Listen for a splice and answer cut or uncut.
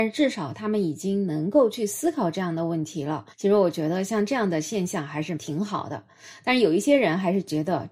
cut